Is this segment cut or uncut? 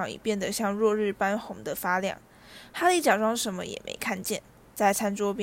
uncut